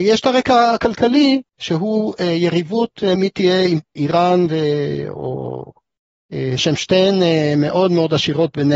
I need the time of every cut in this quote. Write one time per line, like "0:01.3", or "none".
0:01.4
0:03.2
0:04.0
0:06.6